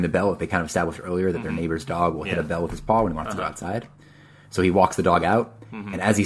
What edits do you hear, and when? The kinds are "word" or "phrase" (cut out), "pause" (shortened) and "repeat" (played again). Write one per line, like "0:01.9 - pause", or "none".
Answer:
none

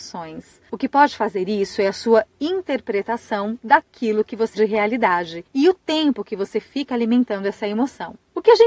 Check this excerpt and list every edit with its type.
0:04.5 - word

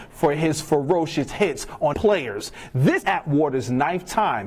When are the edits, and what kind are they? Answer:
0:01.9 - word
0:03.0 - word

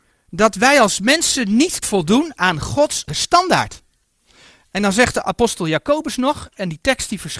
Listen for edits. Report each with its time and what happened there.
0:01.8 - word
0:03.1 - word

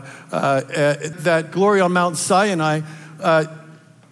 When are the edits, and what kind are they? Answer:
0:01.1 - word

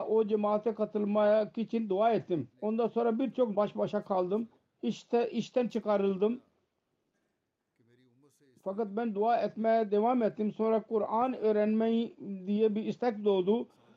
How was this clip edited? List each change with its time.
0:02.5 - pause
0:03.5 - word
0:04.6 - pause

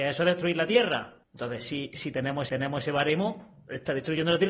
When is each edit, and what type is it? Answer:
0:01.2 - pause
0:02.5 - repeat

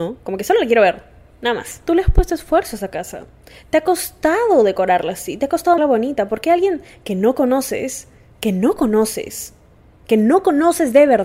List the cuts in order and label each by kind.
0:05.8 - word

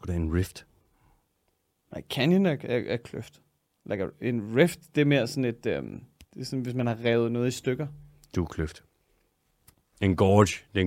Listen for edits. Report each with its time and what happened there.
none

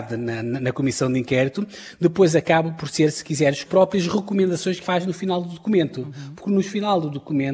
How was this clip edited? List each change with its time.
0:03.6 - phrase
0:04.8 - word

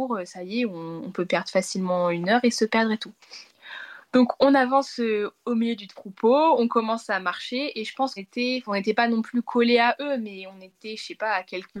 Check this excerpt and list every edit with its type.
0:08.2 - word

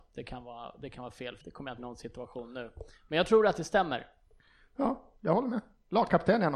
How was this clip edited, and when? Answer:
0:01.4 - word
0:01.8 - word

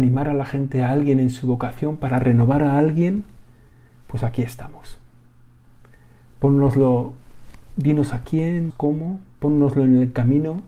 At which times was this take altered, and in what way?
0:08.7 - word

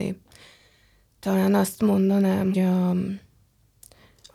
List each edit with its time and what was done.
0:02.5 - word

